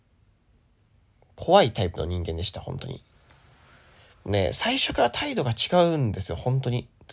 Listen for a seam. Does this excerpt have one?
no; 0 cuts

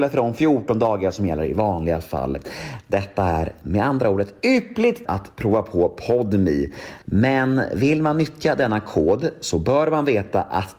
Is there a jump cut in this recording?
yes; 2 cuts; at 5.1 s, 7.0 s

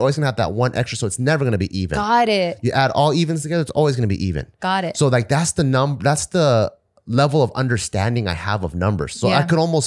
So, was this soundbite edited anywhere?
no; 0 cuts

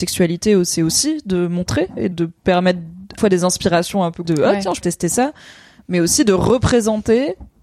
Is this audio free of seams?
no; 4 cuts; at 2.1 s, 3.2 s, 4.2 s, 4.8 s

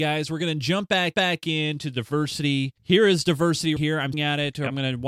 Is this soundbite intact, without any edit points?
no; 4 cuts; at 1.1 s, 2.8 s, 3.8 s, 4.1 s

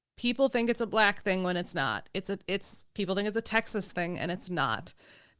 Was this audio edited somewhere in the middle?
no; 0 cuts

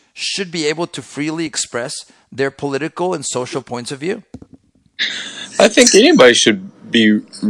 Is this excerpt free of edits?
yes; 0 cuts

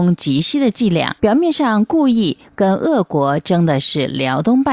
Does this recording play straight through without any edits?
no; 1 cut; at 1.2 s

